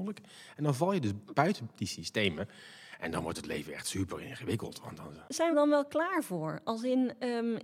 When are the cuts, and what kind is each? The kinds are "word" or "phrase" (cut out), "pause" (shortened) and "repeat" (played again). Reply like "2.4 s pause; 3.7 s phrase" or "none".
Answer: 5.5 s phrase